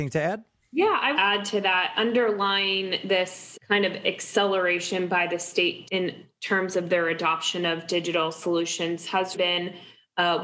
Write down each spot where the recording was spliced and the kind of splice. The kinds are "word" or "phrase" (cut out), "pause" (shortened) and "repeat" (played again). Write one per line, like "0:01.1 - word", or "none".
0:01.1 - phrase
0:03.5 - word
0:05.8 - word
0:09.3 - word